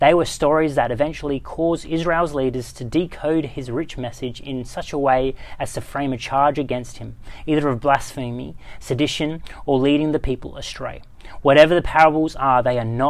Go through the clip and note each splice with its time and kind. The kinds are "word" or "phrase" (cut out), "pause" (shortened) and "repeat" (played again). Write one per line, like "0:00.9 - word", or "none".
none